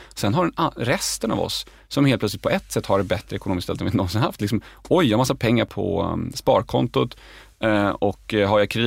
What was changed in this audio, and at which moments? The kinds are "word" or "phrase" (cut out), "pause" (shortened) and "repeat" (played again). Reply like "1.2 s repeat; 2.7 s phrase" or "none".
none